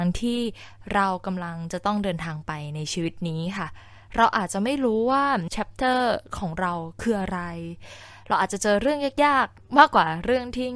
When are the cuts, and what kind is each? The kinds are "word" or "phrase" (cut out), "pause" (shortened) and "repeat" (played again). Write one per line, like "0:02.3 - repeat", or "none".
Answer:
0:05.5 - word